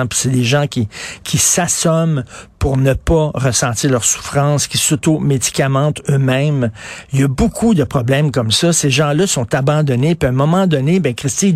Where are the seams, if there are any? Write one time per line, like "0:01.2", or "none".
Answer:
none